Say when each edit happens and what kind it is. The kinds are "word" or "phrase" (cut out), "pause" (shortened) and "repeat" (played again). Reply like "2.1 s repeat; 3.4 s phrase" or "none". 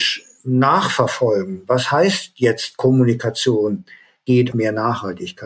4.5 s word

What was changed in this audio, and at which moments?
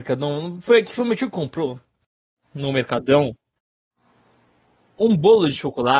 none

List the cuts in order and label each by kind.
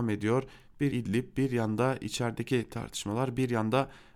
0.9 s word

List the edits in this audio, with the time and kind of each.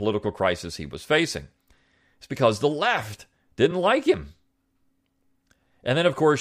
none

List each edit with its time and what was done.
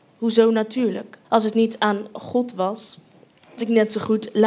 1.2 s pause; 3.6 s word

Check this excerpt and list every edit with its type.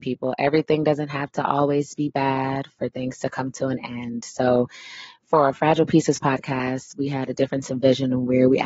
none

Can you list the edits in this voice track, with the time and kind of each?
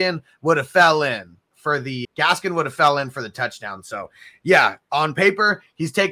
2.0 s word

